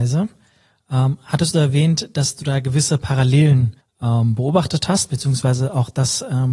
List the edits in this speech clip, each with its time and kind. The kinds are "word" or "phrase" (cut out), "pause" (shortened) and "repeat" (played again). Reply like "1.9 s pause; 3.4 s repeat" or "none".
3.8 s pause